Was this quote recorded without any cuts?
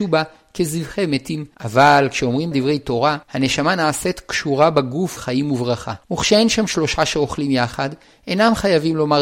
no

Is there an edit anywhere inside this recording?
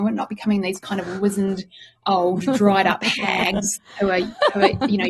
no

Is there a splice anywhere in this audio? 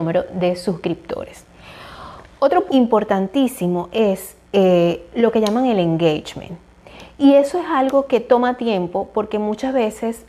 yes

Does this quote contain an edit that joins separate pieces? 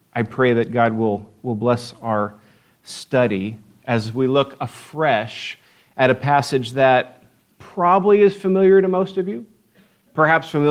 no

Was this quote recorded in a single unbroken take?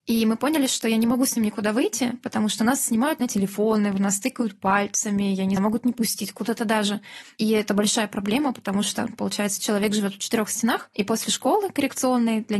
no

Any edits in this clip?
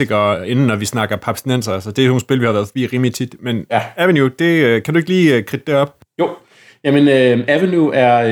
no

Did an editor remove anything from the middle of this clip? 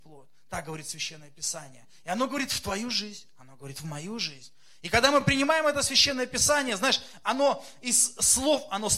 no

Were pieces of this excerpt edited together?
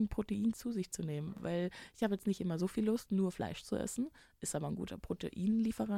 no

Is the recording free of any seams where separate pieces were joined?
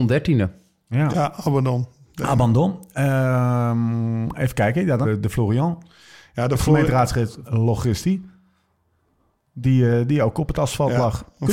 no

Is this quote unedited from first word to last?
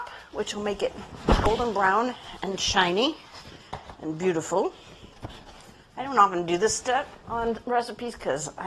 yes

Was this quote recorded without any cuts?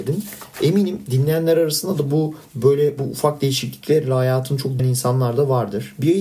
no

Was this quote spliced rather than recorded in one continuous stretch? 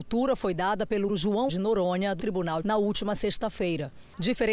yes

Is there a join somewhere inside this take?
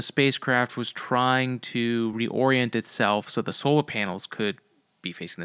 no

